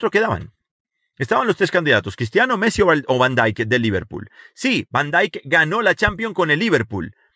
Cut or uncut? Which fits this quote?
uncut